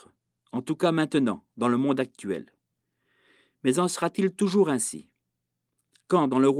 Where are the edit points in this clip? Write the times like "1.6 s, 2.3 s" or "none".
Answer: none